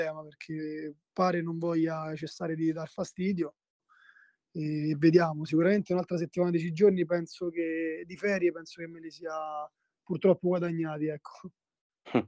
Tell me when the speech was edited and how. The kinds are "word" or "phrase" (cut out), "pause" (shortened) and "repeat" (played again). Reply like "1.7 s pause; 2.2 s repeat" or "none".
none